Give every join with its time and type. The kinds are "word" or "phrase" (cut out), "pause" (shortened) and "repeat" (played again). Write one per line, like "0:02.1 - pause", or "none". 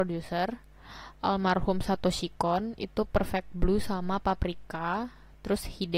none